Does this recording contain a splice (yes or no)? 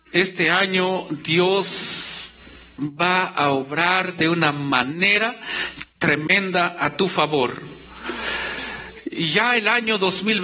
no